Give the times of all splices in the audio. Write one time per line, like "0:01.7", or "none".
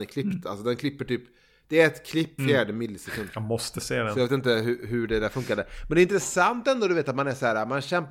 0:02.4